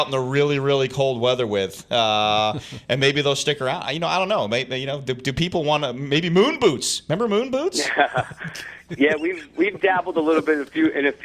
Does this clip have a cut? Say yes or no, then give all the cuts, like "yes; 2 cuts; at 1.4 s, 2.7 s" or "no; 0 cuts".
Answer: no; 0 cuts